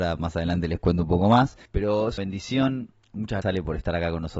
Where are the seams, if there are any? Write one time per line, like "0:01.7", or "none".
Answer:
0:01.7
0:02.2
0:03.4